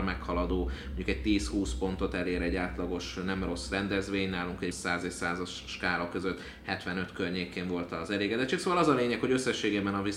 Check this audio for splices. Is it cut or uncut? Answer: cut